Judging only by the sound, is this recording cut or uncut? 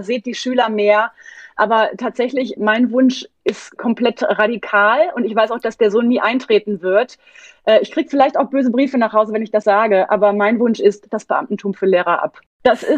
cut